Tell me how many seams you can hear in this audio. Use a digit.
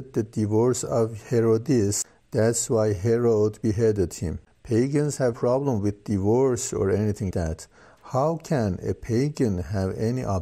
2